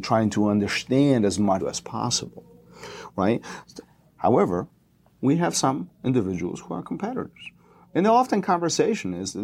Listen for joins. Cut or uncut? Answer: cut